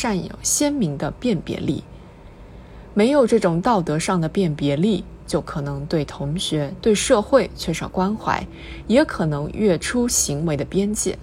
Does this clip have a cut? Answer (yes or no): yes